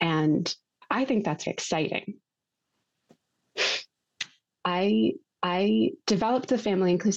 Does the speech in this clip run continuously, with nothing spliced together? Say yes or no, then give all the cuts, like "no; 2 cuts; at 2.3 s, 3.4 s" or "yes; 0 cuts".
no; 2 cuts; at 1.5 s, 5.2 s